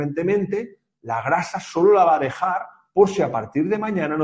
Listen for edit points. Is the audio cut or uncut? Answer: uncut